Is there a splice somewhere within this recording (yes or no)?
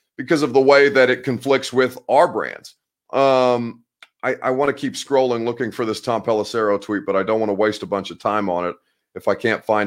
no